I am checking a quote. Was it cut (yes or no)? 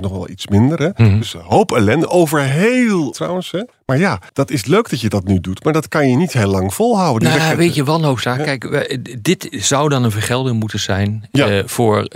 yes